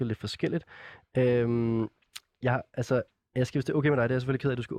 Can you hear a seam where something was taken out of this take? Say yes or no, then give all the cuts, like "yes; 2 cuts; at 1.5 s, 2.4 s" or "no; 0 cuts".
no; 0 cuts